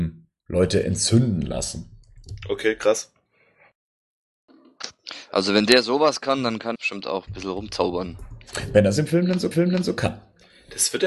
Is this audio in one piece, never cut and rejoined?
no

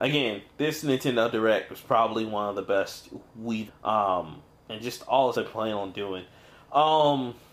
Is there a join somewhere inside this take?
yes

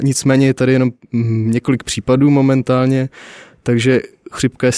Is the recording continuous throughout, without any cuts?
yes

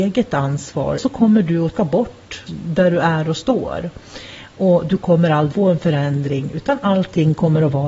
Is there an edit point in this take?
yes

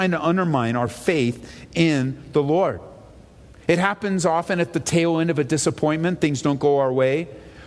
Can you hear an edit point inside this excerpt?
no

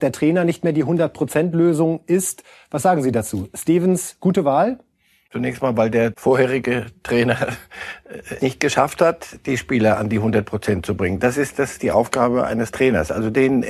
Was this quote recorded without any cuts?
no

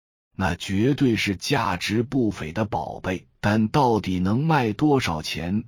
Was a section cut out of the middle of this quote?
yes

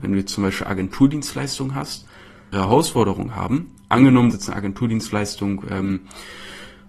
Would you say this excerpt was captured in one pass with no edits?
no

